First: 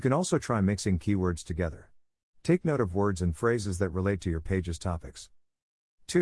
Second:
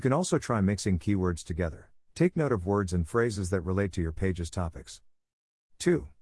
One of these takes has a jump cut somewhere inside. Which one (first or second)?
second